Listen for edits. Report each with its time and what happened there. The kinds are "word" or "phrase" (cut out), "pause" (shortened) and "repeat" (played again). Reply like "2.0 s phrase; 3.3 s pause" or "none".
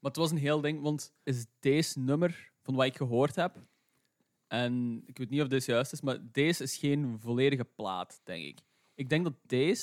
1.2 s word